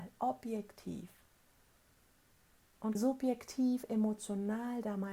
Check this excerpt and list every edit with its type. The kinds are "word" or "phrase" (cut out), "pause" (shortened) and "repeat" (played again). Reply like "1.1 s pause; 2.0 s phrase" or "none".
3.0 s word